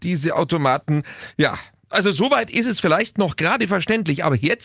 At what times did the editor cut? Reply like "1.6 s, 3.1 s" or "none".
1.9 s